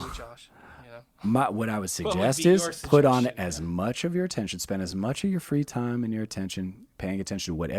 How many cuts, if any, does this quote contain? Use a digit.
0